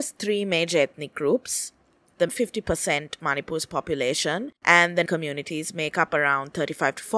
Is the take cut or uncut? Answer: cut